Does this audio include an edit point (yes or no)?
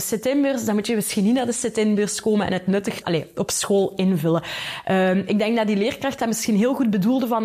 yes